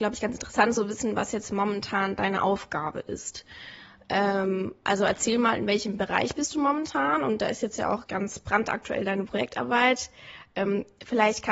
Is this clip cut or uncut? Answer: cut